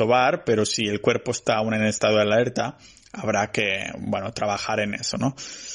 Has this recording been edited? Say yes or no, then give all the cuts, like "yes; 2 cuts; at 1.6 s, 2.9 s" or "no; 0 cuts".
no; 0 cuts